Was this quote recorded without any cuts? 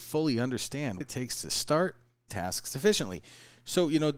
no; 2 cuts; at 1.0 s, 2.3 s

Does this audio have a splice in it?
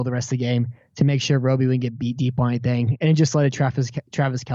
no; 0 cuts

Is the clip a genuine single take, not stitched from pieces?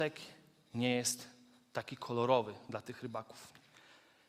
yes; 0 cuts

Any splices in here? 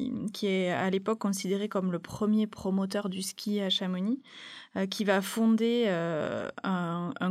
no; 0 cuts

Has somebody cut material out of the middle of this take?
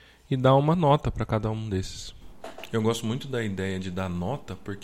no; 0 cuts

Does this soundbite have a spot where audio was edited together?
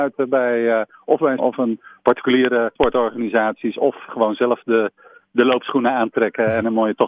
yes; 3 cuts; at 1.4 s, 2.8 s, 4.1 s

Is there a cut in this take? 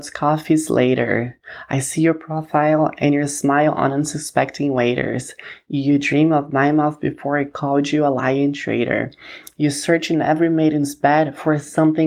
no; 0 cuts

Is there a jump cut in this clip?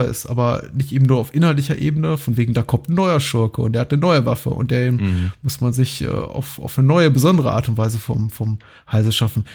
no; 0 cuts

